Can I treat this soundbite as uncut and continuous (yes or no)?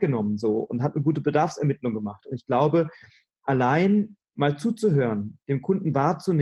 yes